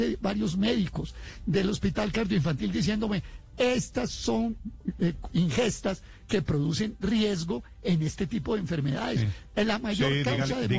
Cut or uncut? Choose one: uncut